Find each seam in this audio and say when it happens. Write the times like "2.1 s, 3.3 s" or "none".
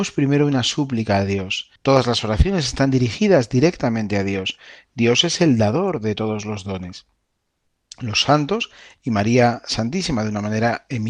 1.8 s